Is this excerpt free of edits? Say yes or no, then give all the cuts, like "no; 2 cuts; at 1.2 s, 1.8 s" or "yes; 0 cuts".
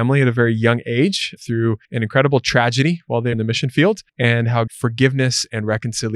no; 5 cuts; at 1.4 s, 1.8 s, 3.3 s, 4.1 s, 4.7 s